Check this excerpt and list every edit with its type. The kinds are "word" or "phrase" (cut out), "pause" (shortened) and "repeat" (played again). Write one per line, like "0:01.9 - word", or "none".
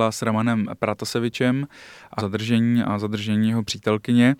0:02.2 - word